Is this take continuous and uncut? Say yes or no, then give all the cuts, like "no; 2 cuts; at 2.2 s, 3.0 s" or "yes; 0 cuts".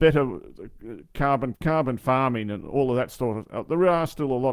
no; 1 cut; at 1.5 s